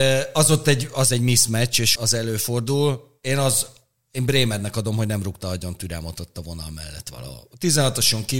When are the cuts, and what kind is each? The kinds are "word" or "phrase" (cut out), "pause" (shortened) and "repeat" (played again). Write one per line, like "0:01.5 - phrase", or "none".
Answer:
0:02.0 - word